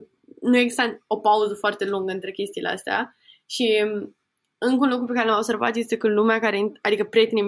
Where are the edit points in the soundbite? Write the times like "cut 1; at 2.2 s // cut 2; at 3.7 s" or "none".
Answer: none